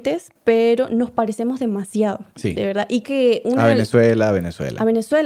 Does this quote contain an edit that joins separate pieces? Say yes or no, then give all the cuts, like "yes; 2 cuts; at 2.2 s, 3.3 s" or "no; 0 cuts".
yes; 2 cuts; at 2.3 s, 3.0 s